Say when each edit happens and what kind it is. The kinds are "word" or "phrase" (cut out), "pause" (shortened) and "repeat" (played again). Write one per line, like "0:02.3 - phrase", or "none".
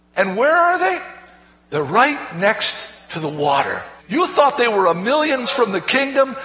0:04.0 - pause
0:05.4 - word